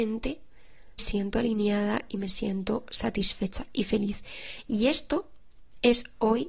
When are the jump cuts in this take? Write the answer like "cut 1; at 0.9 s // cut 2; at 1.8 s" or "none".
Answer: cut 1; at 1.0 s